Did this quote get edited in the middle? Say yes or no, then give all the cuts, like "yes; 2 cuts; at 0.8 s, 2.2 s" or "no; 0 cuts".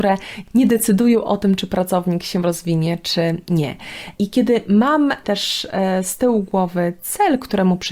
no; 0 cuts